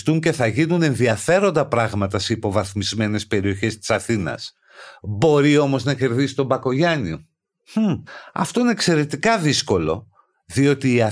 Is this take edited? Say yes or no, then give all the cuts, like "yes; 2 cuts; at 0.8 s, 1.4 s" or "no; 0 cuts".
no; 0 cuts